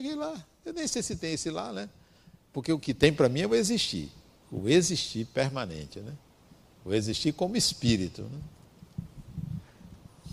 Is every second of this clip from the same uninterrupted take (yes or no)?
yes